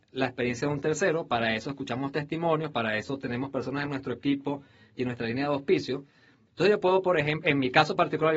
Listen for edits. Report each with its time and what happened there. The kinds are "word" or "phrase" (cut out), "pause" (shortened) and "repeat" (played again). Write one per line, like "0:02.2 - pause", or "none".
none